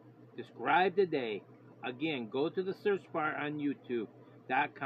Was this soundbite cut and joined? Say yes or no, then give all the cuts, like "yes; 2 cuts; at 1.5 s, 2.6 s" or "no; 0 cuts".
no; 0 cuts